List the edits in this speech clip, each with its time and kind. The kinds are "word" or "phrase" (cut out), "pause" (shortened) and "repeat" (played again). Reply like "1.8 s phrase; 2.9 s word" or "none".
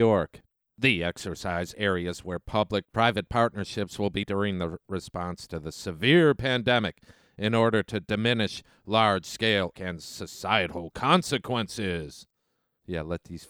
1.7 s word; 4.2 s word; 9.7 s word